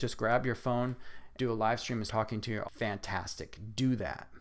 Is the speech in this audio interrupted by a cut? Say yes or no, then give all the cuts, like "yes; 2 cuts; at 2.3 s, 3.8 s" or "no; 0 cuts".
yes; 3 cuts; at 1.4 s, 2.1 s, 2.6 s